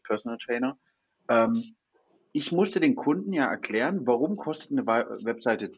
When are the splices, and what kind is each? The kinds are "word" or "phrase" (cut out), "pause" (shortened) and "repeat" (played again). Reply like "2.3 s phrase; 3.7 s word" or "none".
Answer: none